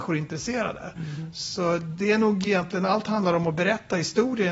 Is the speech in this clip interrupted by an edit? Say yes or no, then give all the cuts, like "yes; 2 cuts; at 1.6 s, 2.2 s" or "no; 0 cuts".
no; 0 cuts